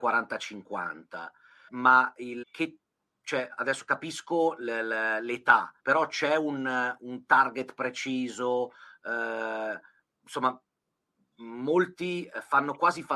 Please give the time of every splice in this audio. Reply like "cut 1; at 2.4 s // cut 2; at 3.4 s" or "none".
cut 1; at 1.7 s // cut 2; at 2.4 s // cut 3; at 5.8 s